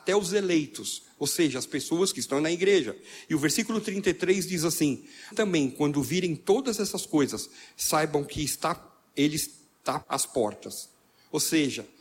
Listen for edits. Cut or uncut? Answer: cut